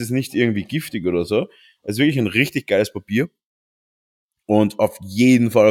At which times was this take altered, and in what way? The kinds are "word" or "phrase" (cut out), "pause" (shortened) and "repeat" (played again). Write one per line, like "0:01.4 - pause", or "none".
none